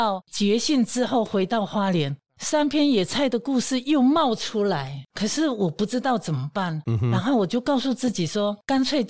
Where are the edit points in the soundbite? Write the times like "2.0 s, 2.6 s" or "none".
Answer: 5.1 s